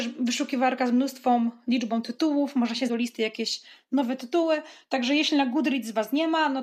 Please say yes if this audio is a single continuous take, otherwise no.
no